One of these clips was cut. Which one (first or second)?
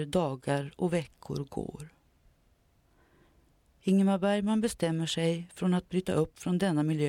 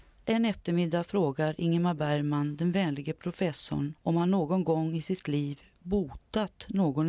second